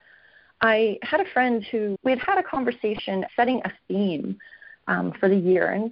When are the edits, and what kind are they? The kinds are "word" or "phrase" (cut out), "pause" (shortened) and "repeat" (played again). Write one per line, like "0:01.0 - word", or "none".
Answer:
0:02.0 - phrase
0:03.3 - word